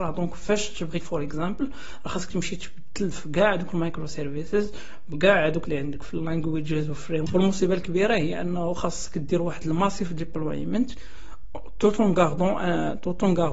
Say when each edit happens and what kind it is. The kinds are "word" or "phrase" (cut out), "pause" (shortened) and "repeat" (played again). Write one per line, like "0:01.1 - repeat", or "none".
0:01.0 - word
0:05.6 - word
0:07.3 - word